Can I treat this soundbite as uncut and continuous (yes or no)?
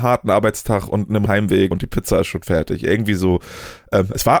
no